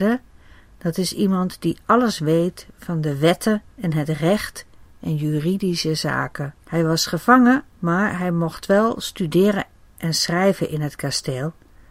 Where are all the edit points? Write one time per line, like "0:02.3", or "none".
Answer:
0:03.7
0:06.6
0:07.7